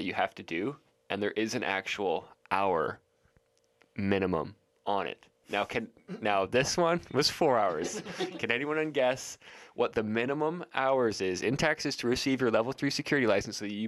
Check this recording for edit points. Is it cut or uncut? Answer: uncut